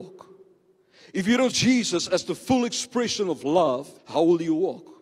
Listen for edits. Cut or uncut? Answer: cut